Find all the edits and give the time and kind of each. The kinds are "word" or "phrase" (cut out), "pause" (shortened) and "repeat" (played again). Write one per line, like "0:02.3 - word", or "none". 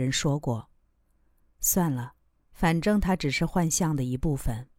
none